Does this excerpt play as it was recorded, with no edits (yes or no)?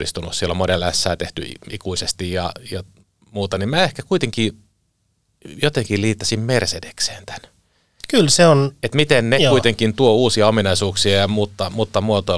yes